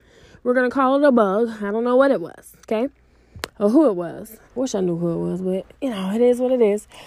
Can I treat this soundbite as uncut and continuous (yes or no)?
no